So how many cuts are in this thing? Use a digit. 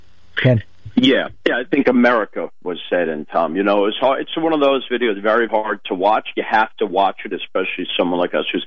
1